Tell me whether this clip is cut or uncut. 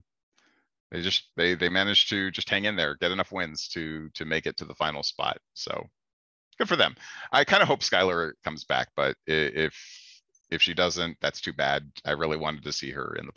uncut